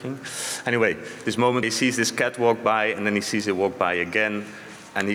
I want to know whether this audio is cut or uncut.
cut